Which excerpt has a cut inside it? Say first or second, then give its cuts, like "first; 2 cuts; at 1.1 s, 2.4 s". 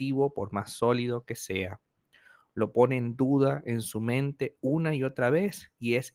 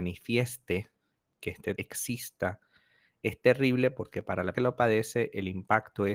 second; 2 cuts; at 1.8 s, 4.5 s